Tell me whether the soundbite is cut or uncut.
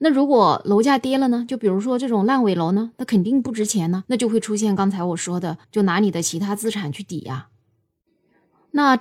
cut